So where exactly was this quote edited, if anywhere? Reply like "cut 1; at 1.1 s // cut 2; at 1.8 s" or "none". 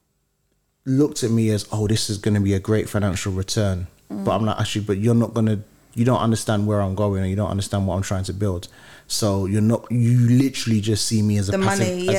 none